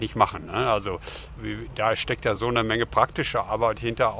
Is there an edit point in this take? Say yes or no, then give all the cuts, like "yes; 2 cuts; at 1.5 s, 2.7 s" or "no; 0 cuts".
no; 0 cuts